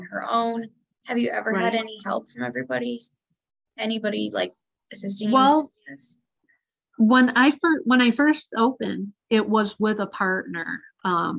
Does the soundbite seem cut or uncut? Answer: uncut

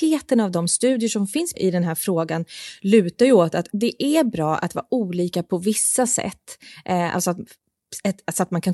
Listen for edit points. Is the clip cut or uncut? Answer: cut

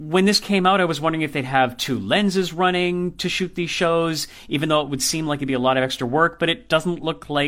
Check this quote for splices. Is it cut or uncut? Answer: uncut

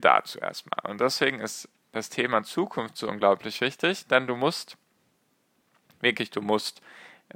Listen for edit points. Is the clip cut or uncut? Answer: uncut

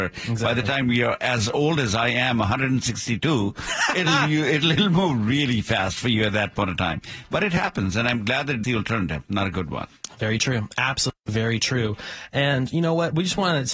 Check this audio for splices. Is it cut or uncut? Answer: cut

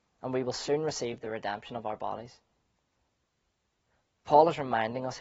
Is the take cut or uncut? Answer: uncut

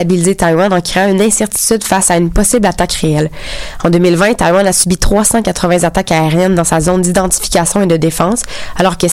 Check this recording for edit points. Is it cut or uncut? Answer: uncut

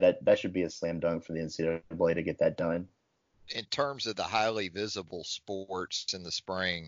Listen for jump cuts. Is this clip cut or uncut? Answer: uncut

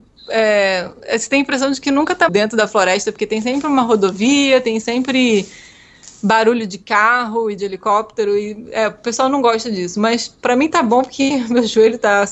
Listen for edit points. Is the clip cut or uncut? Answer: cut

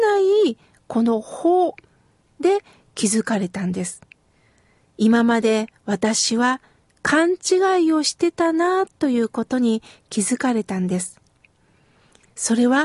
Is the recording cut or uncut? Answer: uncut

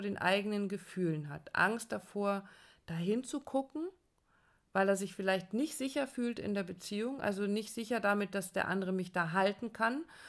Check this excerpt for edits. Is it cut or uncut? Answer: uncut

